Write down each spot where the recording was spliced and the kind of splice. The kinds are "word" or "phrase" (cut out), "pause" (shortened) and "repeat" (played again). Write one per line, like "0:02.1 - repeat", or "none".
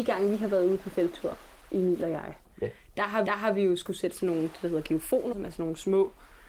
0:02.4 - pause
0:03.3 - repeat
0:05.3 - word